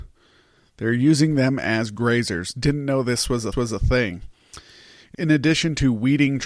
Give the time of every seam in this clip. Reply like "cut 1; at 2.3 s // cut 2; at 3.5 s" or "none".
cut 1; at 3.5 s // cut 2; at 5.1 s